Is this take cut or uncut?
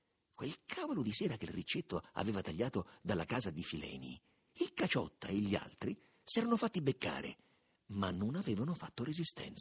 uncut